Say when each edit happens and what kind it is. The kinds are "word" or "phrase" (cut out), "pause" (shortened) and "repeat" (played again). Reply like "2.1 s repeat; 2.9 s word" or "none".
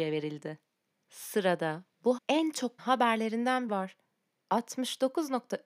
2.2 s word; 2.8 s word; 3.7 s word